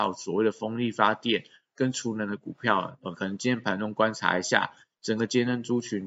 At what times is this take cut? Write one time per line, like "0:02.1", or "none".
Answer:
none